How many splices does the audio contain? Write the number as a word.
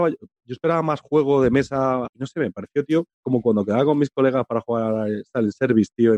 two